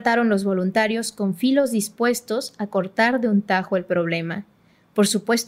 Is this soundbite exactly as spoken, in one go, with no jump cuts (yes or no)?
yes